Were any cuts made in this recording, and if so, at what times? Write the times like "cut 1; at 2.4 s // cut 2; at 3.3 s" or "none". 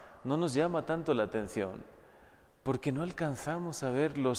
none